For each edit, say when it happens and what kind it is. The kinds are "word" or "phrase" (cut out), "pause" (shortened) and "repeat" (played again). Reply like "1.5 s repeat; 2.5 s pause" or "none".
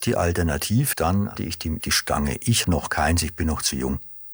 0.9 s word; 1.3 s word; 1.8 s word; 2.6 s word